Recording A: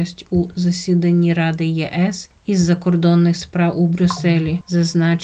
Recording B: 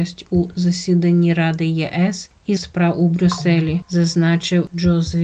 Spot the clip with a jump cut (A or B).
B